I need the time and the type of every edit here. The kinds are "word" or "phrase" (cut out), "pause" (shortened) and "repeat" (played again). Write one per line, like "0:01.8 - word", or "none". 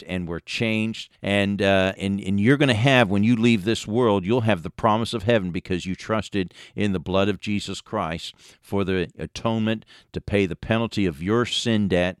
0:01.1 - pause
0:02.0 - word